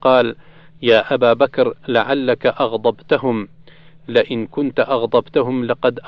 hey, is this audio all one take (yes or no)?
yes